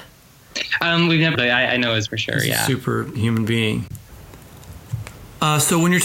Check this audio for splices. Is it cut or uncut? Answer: cut